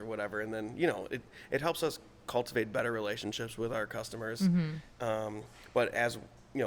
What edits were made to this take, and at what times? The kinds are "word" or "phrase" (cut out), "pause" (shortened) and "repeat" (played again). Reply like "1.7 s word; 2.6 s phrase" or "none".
none